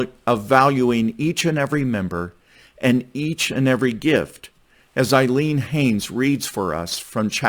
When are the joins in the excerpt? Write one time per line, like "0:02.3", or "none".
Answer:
none

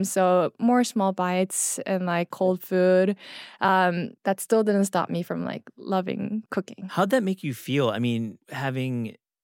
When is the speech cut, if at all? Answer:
0:06.5
0:08.4

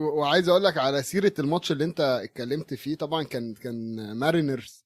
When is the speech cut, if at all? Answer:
none

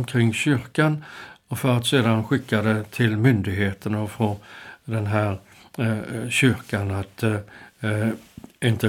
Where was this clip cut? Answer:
none

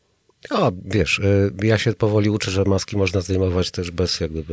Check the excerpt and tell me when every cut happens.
none

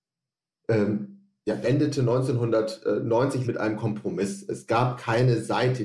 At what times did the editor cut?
0:01.6
0:03.4

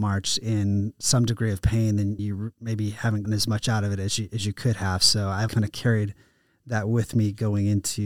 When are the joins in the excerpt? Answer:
0:02.2
0:03.2
0:05.5

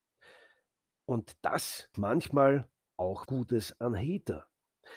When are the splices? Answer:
0:01.9
0:03.3

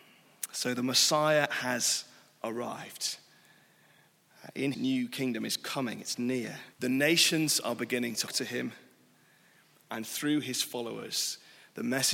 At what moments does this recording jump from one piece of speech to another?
0:04.7
0:06.7
0:08.3

